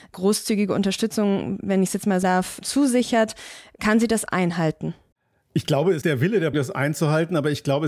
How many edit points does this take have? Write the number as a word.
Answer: five